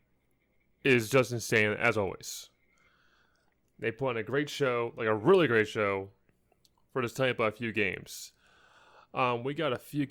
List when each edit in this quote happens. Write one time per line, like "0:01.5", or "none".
none